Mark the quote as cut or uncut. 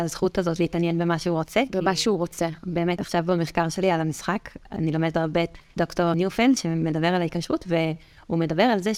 cut